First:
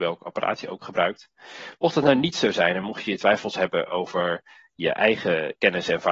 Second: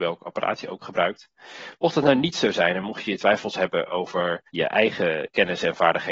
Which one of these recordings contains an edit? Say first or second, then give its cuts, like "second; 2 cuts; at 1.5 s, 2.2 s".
second; 1 cut; at 4.5 s